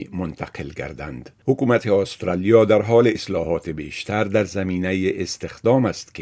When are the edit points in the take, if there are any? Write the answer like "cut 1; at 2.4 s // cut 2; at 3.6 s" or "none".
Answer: cut 1; at 1.4 s // cut 2; at 3.1 s